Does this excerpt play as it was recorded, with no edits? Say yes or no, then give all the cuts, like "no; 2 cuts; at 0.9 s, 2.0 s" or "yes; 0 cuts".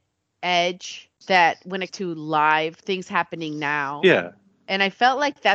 no; 2 cuts; at 1.2 s, 1.9 s